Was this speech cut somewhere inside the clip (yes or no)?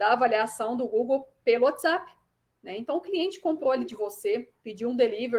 no